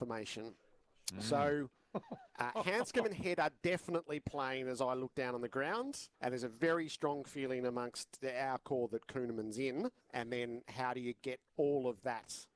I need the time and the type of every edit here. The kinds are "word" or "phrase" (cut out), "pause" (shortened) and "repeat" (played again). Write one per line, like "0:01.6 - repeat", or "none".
0:02.3 - pause
0:06.1 - pause
0:10.0 - pause